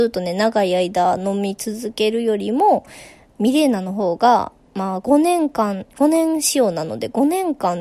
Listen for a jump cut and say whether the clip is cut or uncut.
uncut